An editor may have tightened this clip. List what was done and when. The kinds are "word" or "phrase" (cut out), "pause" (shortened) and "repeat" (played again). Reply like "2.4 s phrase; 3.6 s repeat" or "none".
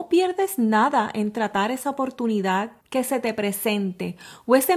2.8 s pause